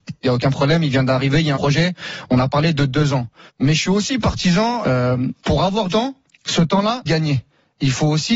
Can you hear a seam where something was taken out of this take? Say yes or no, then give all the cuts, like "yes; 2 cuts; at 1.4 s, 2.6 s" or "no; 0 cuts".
yes; 7 cuts; at 1.5 s, 3.5 s, 4.8 s, 5.4 s, 5.9 s, 6.3 s, 7.1 s